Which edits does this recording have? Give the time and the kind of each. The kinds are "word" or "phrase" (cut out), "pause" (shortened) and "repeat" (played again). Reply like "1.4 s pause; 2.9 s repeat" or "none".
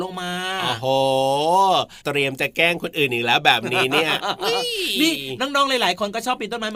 2.0 s pause